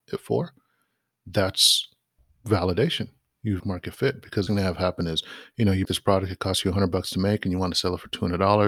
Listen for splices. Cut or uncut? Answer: cut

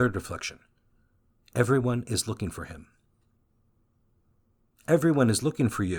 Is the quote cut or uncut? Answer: uncut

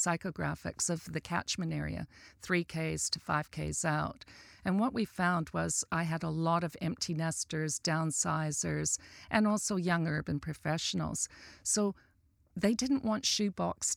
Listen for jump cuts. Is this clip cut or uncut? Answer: uncut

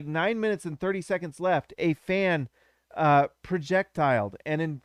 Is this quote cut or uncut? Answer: uncut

